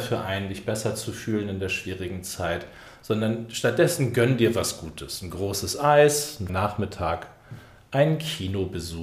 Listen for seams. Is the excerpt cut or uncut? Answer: cut